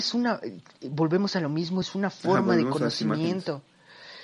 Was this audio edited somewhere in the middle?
no; 0 cuts

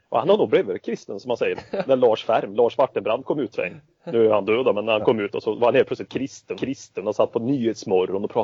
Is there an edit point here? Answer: yes; 3 cuts; at 1.8 s, 3.5 s, 6.5 s

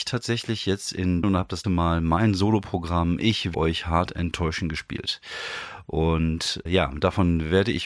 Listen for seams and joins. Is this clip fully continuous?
no; 4 cuts; at 1.2 s, 1.6 s, 3.5 s, 6.7 s

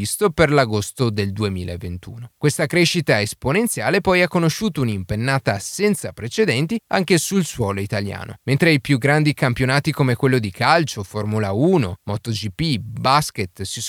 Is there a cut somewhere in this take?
no; 0 cuts

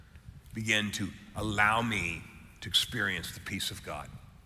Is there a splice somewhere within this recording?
no; 0 cuts

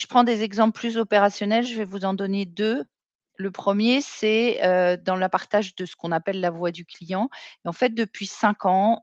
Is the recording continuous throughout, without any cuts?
yes; 0 cuts

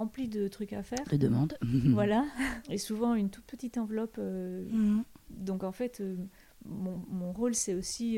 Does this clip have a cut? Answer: no; 0 cuts

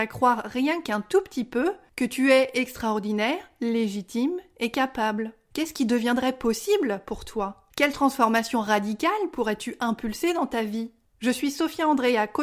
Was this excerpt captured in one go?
yes; 0 cuts

